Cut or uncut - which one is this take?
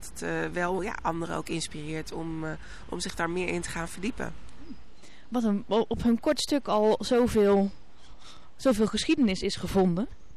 uncut